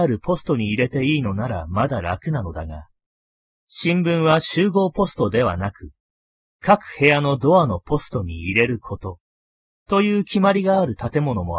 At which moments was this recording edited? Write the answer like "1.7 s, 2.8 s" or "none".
none